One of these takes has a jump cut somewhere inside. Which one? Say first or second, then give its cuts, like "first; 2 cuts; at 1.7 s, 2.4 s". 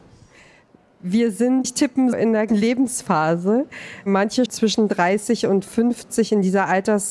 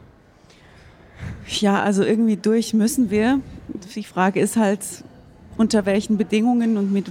first; 4 cuts; at 1.6 s, 2.1 s, 2.5 s, 4.5 s